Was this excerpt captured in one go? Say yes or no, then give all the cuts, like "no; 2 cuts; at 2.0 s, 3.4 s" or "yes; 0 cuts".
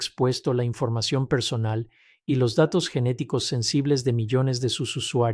yes; 0 cuts